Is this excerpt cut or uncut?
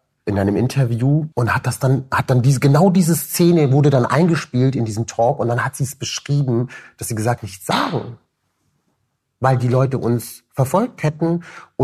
cut